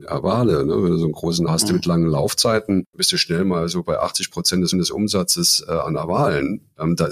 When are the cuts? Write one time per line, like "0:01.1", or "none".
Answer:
0:01.5
0:02.9
0:04.7